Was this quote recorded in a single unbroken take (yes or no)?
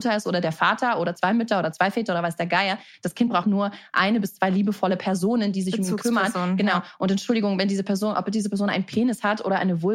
no